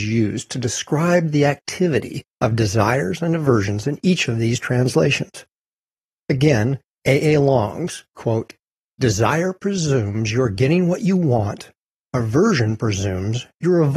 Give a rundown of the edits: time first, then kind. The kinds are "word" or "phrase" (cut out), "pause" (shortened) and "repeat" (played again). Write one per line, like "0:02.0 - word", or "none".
0:08.1 - pause